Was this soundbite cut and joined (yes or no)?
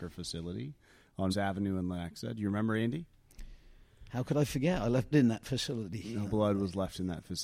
yes